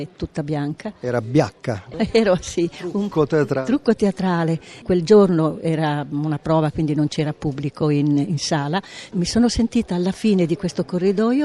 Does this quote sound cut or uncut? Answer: uncut